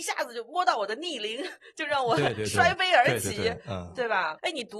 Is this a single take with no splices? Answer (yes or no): yes